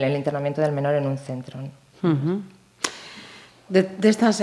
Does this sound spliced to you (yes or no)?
no